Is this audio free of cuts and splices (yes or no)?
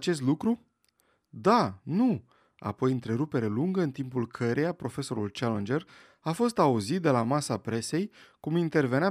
yes